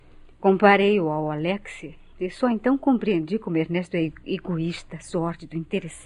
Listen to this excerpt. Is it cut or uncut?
uncut